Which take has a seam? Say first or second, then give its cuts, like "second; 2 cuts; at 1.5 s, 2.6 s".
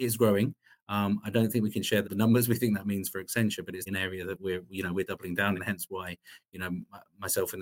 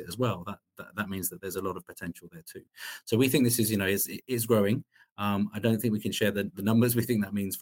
first; 3 cuts; at 2.0 s, 3.9 s, 5.5 s